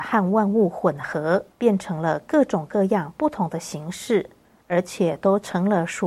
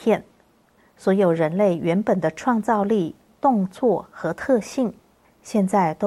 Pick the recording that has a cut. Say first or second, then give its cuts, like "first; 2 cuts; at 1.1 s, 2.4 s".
first; 1 cut; at 1.5 s